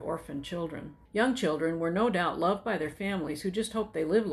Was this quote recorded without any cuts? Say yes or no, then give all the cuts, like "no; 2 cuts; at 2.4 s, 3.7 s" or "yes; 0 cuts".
no; 1 cut; at 1.1 s